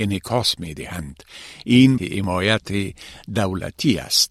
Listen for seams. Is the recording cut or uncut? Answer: cut